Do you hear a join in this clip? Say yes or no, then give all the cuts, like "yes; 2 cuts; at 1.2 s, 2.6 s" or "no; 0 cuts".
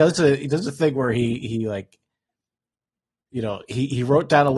no; 0 cuts